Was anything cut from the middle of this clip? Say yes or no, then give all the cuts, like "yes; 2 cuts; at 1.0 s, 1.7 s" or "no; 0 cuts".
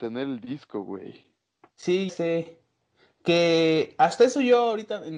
yes; 1 cut; at 2.1 s